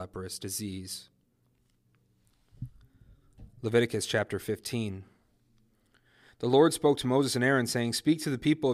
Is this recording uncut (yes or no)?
yes